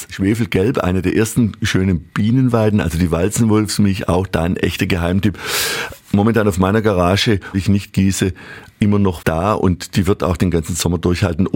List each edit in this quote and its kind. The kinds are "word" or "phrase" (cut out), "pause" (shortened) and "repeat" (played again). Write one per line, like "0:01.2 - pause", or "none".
0:07.5 - word
0:09.2 - word